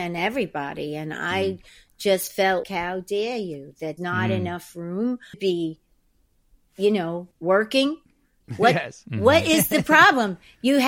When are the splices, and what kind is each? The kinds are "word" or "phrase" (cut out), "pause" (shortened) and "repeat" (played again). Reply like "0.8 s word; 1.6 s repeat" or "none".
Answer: 2.6 s word; 4.0 s word; 5.3 s phrase; 7.3 s pause

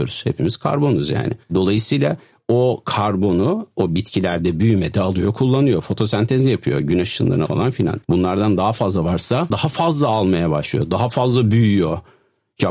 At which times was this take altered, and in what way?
1.4 s pause; 7.5 s word; 8.0 s pause; 9.5 s word

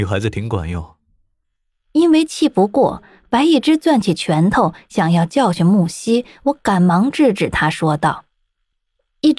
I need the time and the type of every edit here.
none

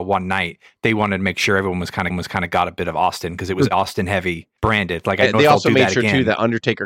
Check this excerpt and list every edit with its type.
2.1 s repeat; 3.7 s word; 4.6 s pause; 5.3 s word

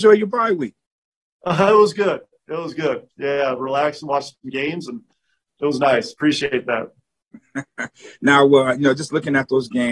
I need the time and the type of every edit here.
none

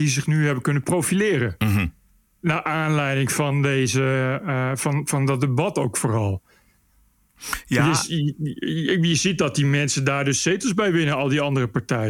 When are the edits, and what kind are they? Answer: none

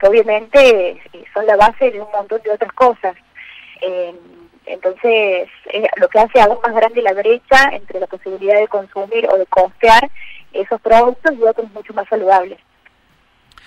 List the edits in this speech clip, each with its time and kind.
none

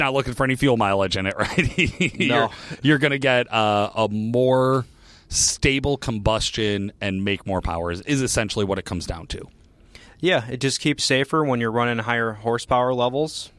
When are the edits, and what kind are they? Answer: 11.0 s word

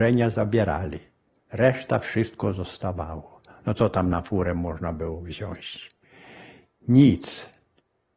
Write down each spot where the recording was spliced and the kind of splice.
none

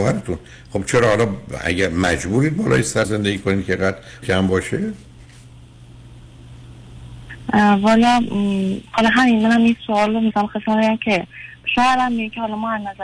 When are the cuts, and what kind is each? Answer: 3.0 s word; 4.2 s word; 10.3 s word

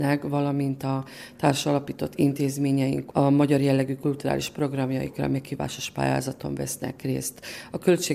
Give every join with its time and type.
none

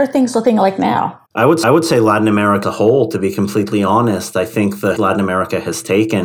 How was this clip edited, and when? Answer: 1.3 s pause; 1.6 s repeat; 2.6 s word; 5.0 s phrase

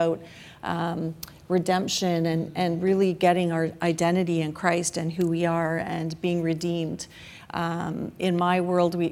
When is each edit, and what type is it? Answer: none

